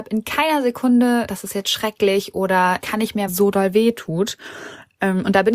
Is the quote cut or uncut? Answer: cut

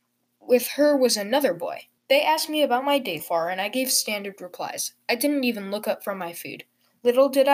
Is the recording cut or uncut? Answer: cut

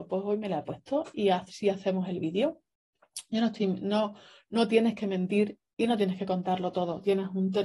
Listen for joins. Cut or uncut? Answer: uncut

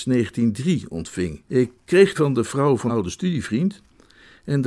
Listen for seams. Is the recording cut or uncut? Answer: cut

